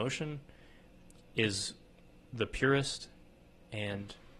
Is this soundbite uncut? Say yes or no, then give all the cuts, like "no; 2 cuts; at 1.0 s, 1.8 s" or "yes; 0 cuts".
yes; 0 cuts